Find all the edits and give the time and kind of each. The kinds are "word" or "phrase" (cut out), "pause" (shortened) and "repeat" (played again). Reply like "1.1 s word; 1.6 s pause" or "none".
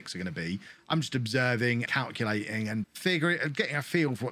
1.9 s word; 2.8 s word